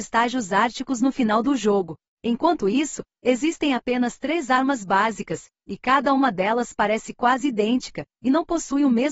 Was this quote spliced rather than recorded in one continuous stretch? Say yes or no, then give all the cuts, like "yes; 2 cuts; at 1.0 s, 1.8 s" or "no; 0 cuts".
no; 0 cuts